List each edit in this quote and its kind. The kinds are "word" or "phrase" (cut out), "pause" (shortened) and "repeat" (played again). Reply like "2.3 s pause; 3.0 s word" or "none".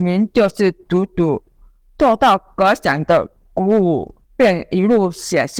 4.2 s pause